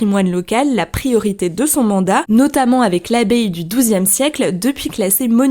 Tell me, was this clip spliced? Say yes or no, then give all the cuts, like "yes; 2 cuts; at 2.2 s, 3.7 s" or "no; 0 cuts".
no; 0 cuts